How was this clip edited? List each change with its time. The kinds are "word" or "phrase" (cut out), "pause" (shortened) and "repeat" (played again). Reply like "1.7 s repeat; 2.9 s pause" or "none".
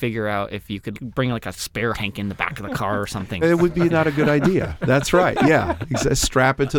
0.9 s word; 1.9 s word; 3.4 s word